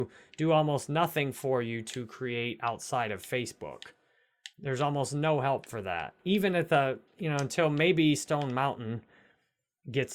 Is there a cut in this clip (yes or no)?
yes